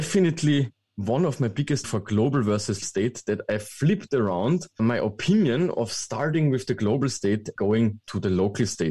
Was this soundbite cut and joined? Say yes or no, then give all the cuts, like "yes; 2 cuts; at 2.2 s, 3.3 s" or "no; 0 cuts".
yes; 4 cuts; at 1.8 s, 2.8 s, 4.8 s, 7.6 s